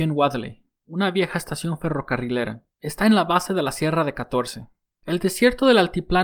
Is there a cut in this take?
no; 0 cuts

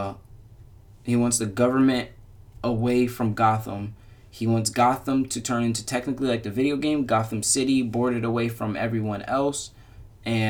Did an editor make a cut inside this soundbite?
no; 0 cuts

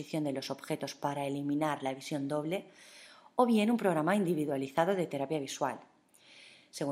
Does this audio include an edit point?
no; 0 cuts

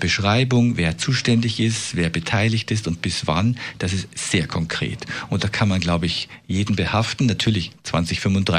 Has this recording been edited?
yes; 1 cut; at 4.1 s

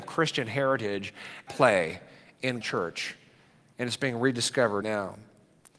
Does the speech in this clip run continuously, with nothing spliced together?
no; 3 cuts; at 1.5 s, 2.6 s, 4.8 s

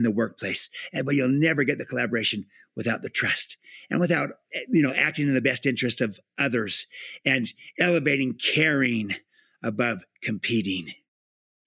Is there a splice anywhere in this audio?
no; 0 cuts

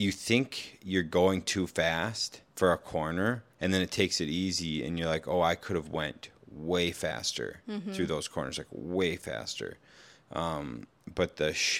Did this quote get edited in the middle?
yes; 2 cuts; at 2.5 s, 3.5 s

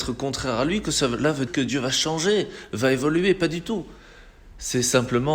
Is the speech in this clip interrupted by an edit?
yes; 1 cut; at 1.5 s

